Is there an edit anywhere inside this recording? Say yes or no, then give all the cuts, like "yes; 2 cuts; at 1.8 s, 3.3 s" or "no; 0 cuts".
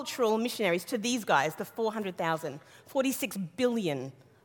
no; 0 cuts